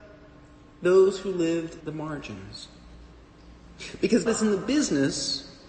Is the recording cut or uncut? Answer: cut